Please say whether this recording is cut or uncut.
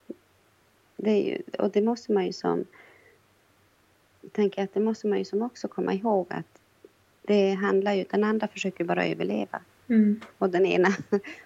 uncut